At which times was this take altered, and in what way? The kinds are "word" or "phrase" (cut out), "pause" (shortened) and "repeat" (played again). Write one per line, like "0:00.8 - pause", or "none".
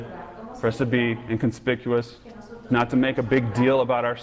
0:02.7 - phrase